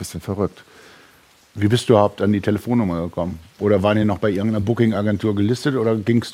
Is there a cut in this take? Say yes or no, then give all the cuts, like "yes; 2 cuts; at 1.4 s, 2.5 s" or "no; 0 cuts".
no; 0 cuts